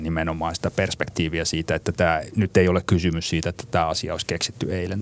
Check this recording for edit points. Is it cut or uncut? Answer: uncut